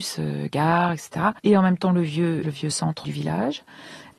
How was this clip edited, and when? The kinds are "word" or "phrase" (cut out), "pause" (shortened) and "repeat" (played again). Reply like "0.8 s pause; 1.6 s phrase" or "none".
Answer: 1.4 s pause; 2.4 s word; 3.0 s word